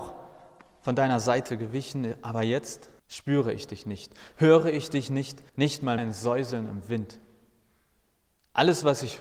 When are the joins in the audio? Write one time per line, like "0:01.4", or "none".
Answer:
0:03.0
0:05.5
0:06.0